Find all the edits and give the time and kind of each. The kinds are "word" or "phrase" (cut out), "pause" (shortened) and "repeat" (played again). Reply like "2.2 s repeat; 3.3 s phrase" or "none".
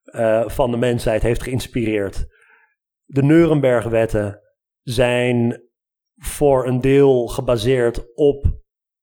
none